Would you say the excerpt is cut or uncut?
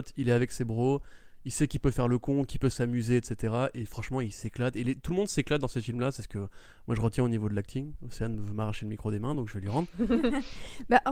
uncut